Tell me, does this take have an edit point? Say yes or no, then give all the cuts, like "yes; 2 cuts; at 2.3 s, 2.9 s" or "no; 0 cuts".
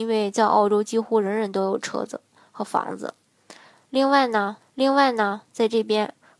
yes; 1 cut; at 4.6 s